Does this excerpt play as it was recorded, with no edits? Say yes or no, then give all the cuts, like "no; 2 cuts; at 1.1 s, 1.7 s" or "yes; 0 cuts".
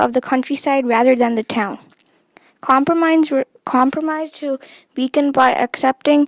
no; 1 cut; at 4.3 s